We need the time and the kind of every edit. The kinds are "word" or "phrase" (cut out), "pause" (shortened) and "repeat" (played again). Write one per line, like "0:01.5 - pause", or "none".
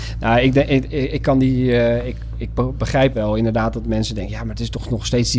0:00.9 - word
0:03.1 - word